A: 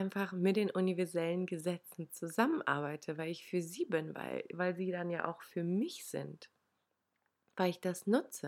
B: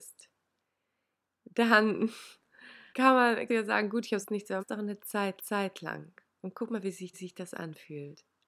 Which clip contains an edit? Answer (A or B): B